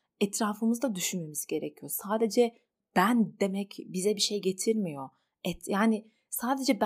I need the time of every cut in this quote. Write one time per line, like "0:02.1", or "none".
none